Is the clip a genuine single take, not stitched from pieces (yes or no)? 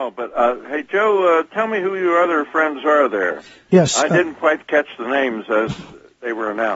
yes